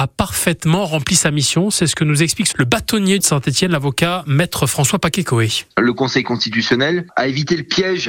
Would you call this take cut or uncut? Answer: cut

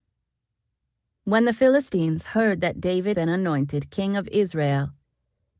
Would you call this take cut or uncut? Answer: cut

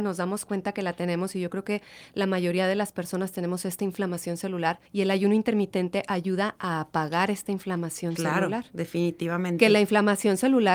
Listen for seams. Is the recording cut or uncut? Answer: cut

